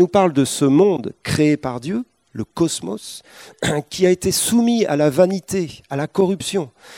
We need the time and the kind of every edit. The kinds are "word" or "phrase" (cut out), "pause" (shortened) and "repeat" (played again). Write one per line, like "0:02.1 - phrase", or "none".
none